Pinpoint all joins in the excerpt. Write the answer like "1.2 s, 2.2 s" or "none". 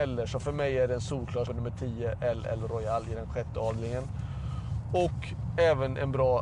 1.5 s